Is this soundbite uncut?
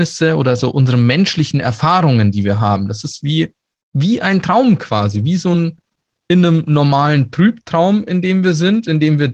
yes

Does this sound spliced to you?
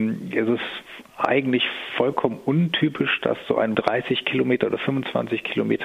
yes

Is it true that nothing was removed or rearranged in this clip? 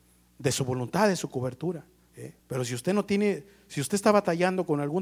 no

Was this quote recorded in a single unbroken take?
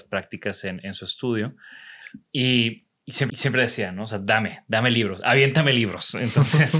no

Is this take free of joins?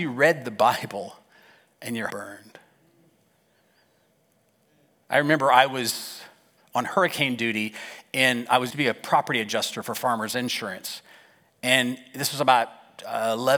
no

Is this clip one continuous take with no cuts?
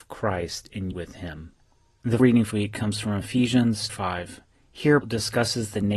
no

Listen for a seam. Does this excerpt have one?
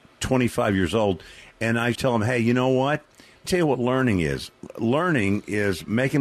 yes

